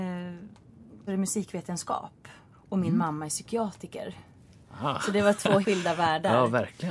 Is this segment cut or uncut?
cut